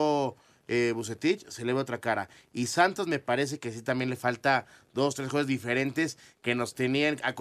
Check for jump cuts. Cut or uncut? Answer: uncut